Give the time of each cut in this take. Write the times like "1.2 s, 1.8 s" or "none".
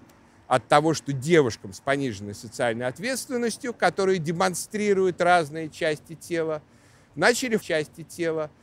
7.6 s

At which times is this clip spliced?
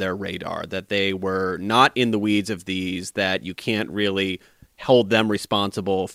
none

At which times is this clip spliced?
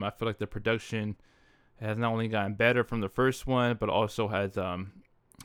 none

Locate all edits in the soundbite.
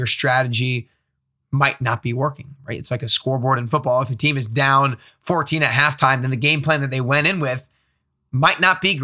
none

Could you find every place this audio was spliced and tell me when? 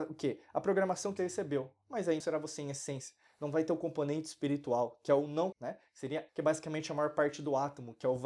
1.2 s, 2.2 s, 5.5 s, 6.3 s

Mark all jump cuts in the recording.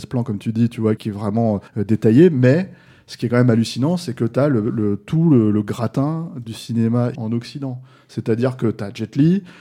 1.0 s, 1.7 s, 7.1 s

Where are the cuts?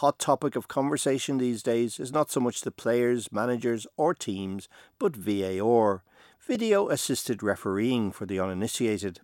none

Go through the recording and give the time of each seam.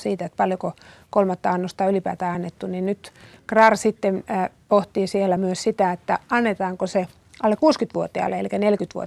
none

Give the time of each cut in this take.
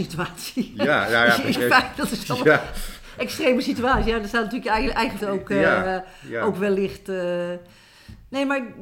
1.5 s, 5.2 s

